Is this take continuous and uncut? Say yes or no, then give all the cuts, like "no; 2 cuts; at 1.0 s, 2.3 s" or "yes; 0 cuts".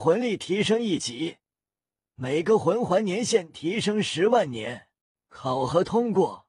no; 1 cut; at 5.0 s